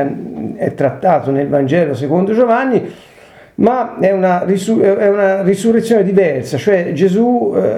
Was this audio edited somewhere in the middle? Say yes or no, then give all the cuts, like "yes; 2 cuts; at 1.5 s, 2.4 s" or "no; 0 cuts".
no; 0 cuts